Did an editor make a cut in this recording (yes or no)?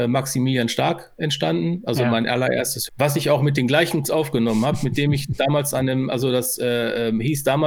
yes